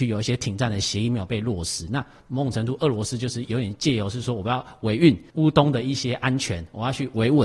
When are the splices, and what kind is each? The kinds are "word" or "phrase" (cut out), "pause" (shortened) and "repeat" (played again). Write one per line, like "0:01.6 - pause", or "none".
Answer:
0:05.3 - pause